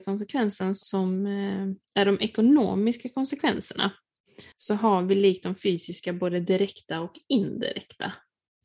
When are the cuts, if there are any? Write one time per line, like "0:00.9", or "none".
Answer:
0:01.8
0:04.5